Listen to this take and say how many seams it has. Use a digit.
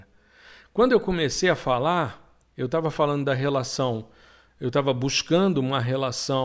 0